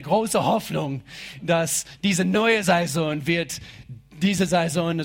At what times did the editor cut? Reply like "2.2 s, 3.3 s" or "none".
none